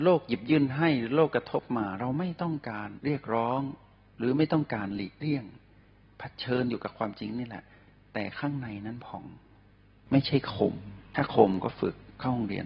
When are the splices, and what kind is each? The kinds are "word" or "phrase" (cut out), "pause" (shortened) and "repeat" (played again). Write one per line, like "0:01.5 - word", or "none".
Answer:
0:11.1 - pause